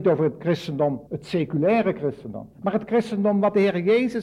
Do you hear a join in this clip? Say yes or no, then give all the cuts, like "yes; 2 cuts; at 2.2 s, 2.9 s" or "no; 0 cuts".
yes; 2 cuts; at 1.1 s, 2.5 s